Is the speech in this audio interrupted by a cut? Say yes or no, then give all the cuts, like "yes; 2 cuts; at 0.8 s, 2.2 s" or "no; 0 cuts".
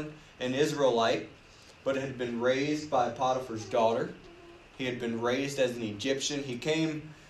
no; 0 cuts